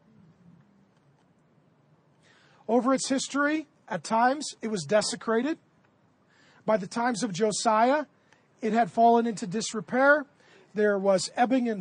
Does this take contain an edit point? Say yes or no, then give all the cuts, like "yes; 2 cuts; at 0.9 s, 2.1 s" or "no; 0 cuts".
no; 0 cuts